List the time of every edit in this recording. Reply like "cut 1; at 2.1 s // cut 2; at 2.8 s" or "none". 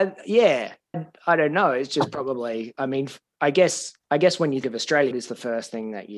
cut 1; at 0.9 s // cut 2; at 3.2 s // cut 3; at 4.6 s // cut 4; at 5.1 s